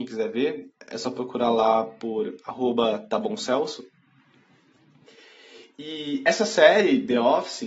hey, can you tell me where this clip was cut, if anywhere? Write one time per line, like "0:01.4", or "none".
none